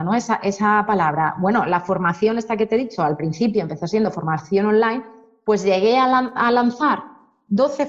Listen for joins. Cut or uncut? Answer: uncut